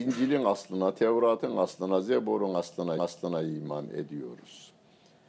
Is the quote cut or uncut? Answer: cut